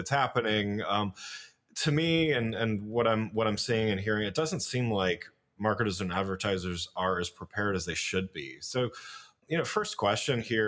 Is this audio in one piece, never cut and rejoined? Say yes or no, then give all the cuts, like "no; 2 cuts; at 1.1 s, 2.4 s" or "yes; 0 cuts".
yes; 0 cuts